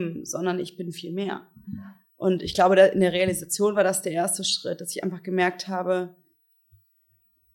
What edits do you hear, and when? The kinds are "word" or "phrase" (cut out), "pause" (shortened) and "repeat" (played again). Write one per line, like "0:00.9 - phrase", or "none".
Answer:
none